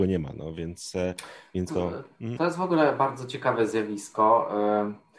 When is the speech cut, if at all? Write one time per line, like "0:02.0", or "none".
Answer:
0:01.7